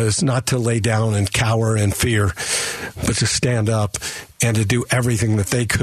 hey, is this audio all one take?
yes; 0 cuts

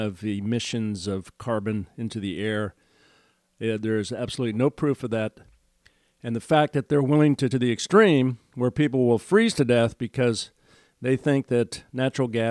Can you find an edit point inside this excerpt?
yes; 1 cut; at 7.5 s

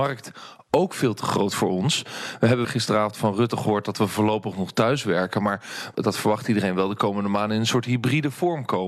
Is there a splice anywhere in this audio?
yes; 2 cuts; at 2.6 s, 5.9 s

